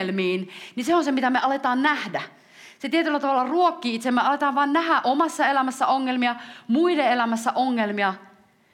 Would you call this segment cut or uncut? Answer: uncut